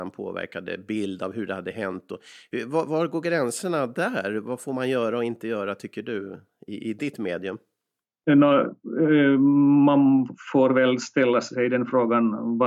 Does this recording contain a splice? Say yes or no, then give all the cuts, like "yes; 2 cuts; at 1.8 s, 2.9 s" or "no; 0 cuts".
no; 0 cuts